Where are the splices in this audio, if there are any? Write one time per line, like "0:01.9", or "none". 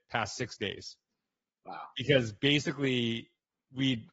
none